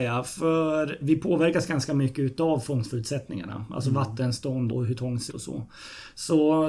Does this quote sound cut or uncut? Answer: cut